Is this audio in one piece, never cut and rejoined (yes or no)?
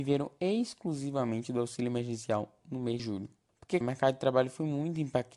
no